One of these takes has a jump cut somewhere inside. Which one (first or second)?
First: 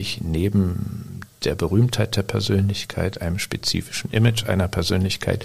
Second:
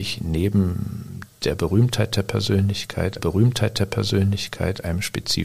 second